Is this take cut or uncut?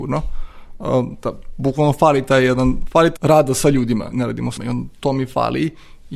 cut